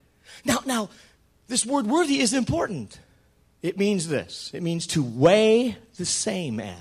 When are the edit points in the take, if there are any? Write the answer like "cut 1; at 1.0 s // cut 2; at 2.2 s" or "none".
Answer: none